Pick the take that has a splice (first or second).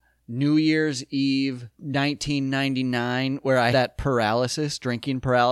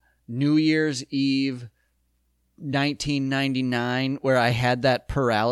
first